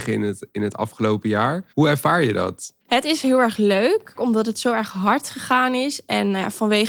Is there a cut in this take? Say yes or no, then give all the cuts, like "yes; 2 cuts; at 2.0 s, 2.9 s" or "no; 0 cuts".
yes; 3 cuts; at 1.7 s, 2.8 s, 4.1 s